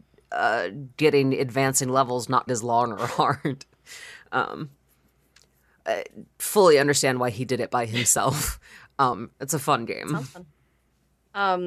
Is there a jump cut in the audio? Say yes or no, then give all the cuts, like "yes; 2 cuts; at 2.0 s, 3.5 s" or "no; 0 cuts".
yes; 1 cut; at 2.5 s